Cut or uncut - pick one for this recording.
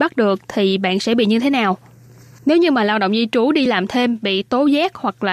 uncut